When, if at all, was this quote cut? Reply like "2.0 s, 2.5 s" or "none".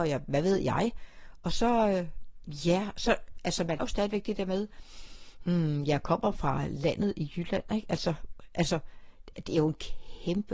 3.8 s